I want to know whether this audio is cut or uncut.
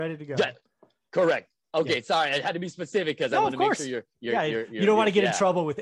uncut